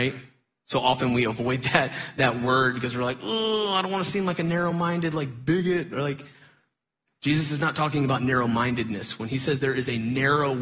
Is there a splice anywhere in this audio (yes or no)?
no